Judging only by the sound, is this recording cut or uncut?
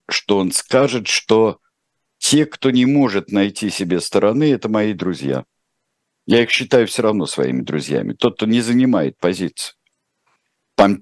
uncut